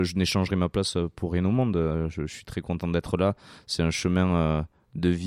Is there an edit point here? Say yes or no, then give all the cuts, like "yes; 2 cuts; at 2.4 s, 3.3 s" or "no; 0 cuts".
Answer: no; 0 cuts